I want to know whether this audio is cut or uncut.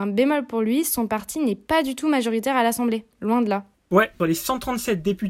uncut